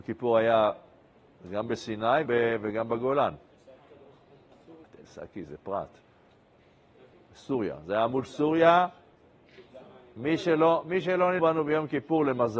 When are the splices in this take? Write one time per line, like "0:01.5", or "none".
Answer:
0:02.3
0:04.8
0:11.4